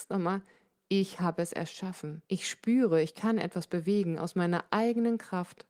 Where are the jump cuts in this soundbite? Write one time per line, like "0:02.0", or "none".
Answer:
0:02.2